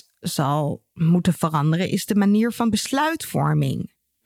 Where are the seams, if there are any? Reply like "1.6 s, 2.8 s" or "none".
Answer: none